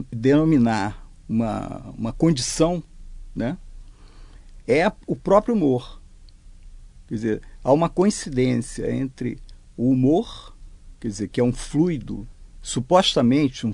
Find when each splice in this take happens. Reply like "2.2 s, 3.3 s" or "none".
12.5 s